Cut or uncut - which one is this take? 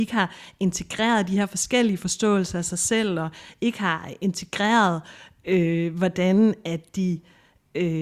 uncut